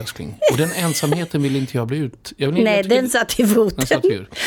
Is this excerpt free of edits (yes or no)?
yes